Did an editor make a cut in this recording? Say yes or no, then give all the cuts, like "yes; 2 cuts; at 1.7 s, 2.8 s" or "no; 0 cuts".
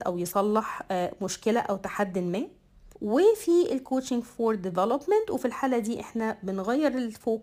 yes; 1 cut; at 3.0 s